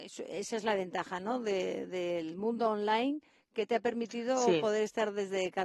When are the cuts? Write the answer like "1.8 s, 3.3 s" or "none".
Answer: none

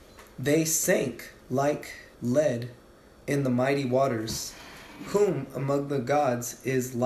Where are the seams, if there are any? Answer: 2.1 s

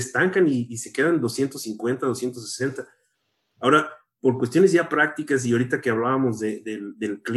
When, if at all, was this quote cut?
none

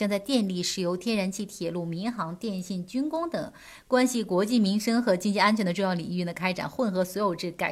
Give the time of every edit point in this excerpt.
none

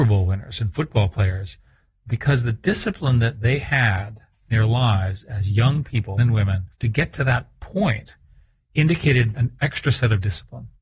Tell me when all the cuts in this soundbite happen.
4.5 s, 6.2 s, 6.7 s, 9.3 s

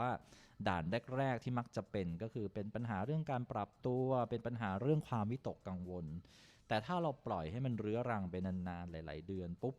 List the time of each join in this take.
none

